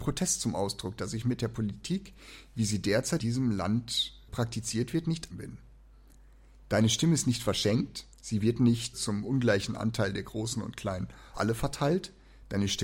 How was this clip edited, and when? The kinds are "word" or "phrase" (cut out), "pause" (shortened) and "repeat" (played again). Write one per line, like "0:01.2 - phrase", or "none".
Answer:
0:03.2 - word
0:04.3 - word
0:05.3 - word
0:08.1 - pause
0:08.9 - word
0:11.3 - word